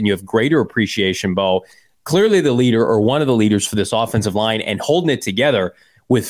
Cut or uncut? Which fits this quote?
uncut